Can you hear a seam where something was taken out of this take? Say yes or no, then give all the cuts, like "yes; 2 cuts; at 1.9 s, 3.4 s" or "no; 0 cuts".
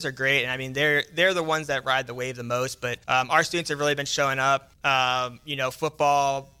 yes; 2 cuts; at 3.0 s, 4.7 s